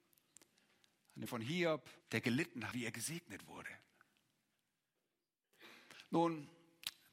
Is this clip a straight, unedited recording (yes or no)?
no